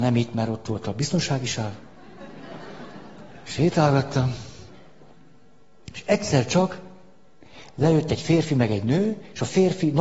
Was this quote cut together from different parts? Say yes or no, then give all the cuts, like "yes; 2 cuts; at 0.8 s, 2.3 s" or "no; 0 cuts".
no; 0 cuts